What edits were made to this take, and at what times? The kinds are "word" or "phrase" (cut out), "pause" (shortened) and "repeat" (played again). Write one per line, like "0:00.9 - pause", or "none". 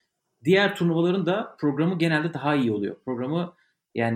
none